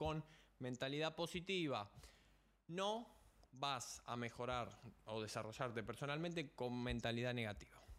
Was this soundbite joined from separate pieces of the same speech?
no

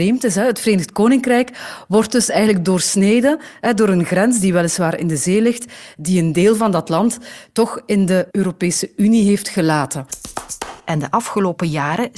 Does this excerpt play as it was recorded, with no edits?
no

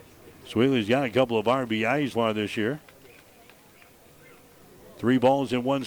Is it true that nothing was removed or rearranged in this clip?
no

